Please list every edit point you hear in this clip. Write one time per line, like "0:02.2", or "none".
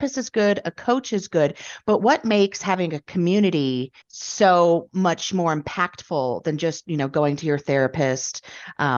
0:04.0